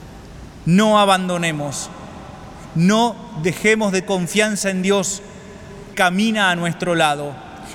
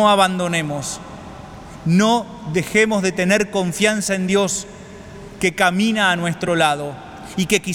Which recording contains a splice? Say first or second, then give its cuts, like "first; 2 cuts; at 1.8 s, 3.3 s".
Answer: first; 2 cuts; at 4.0 s, 5.9 s